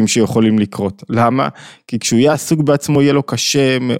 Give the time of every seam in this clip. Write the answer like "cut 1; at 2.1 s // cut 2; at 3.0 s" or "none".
none